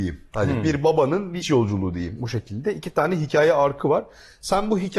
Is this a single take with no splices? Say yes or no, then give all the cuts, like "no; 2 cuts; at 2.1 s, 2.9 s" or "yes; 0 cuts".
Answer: no; 1 cut; at 1.4 s